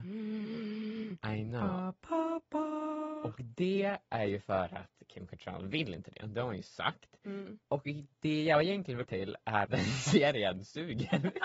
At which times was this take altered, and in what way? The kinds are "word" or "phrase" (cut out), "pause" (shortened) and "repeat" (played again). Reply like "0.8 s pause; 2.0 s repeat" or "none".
9.0 s word; 9.6 s word

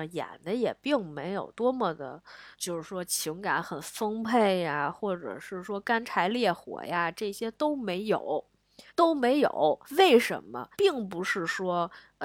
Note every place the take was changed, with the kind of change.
2.5 s pause; 8.9 s pause; 9.8 s pause; 10.7 s pause

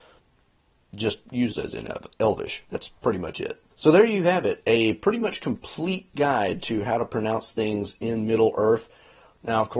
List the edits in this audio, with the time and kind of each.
1.5 s phrase; 3.7 s pause

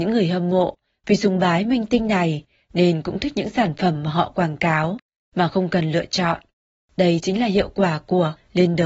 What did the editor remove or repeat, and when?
none

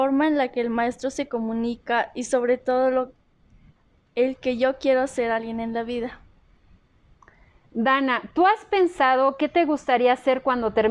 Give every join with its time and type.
none

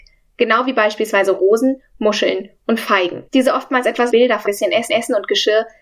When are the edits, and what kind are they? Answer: 3.3 s pause; 4.1 s word; 4.5 s word; 4.9 s repeat

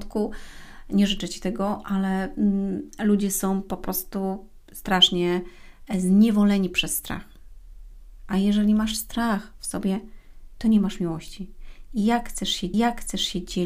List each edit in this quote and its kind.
12.7 s repeat

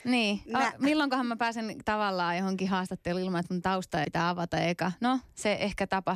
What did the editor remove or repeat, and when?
4.0 s word

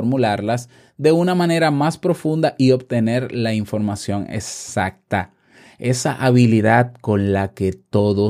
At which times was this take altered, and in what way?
none

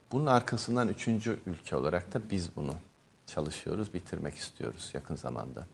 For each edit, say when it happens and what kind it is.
none

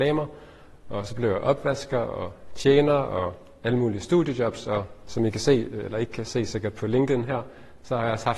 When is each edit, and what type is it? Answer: none

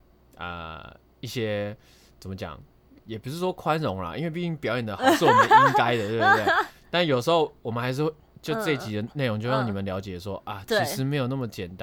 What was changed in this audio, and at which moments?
none

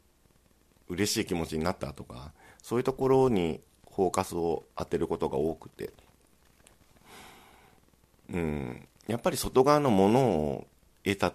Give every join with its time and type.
9.0 s pause

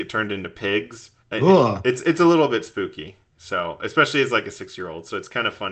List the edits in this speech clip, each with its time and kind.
1.2 s pause

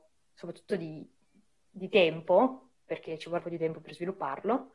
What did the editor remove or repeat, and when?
3.4 s word

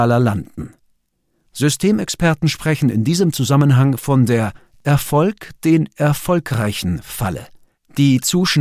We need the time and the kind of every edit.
none

